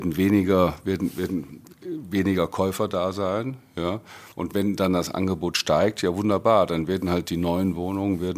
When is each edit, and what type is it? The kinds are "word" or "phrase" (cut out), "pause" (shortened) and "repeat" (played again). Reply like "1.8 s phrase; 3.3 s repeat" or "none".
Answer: 4.3 s pause